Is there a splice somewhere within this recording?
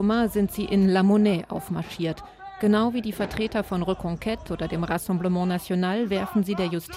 no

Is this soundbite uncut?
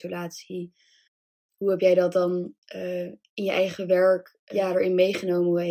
yes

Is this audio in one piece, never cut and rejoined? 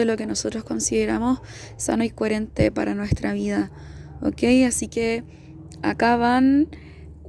yes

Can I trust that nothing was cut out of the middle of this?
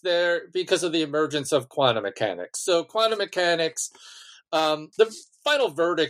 yes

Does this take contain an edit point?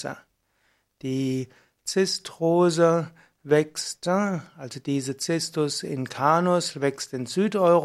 no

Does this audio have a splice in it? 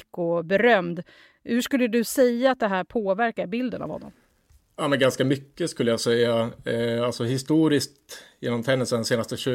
no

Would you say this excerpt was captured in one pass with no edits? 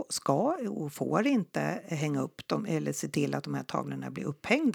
yes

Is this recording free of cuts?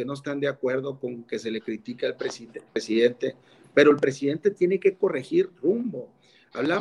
yes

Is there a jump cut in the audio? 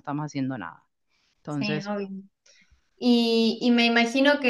no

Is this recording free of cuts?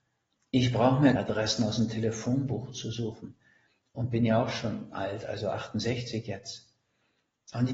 no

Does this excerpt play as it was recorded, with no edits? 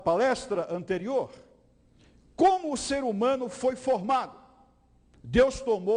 yes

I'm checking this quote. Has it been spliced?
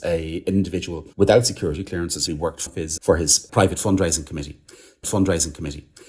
yes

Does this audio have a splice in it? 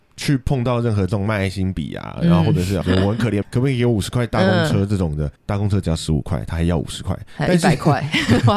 yes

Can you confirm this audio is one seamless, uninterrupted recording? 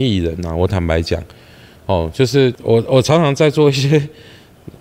yes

